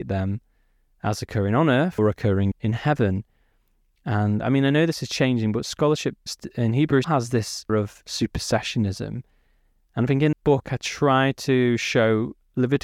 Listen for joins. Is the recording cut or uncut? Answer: cut